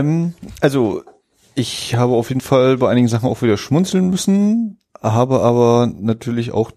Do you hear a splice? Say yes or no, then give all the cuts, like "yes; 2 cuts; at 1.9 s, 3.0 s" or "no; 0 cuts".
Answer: no; 0 cuts